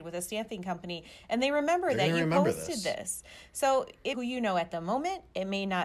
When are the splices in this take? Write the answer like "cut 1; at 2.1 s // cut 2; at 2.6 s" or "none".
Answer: cut 1; at 4.1 s